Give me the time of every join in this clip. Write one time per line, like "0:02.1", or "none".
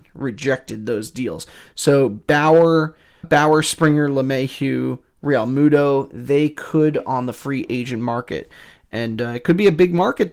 0:03.2
0:07.0